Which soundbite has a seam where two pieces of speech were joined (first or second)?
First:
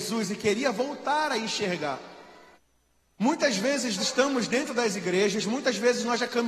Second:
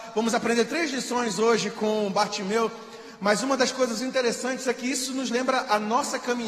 first